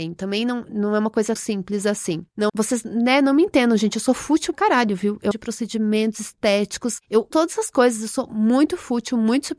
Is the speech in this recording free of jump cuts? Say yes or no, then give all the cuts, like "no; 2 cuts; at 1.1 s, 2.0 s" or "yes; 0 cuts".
no; 5 cuts; at 1.4 s, 2.5 s, 4.5 s, 5.3 s, 7.3 s